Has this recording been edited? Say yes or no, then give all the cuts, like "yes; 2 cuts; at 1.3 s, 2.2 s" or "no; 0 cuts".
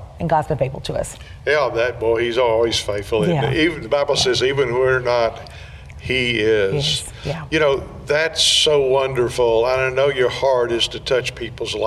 no; 0 cuts